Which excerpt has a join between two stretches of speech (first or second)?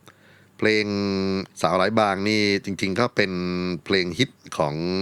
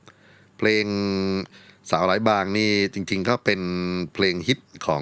first